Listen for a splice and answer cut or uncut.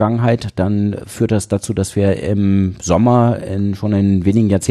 uncut